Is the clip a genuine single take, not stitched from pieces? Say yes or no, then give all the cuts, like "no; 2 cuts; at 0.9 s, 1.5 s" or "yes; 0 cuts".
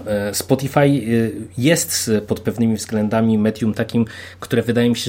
yes; 0 cuts